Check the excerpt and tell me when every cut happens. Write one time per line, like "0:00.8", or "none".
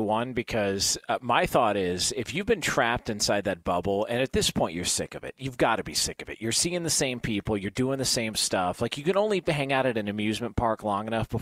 none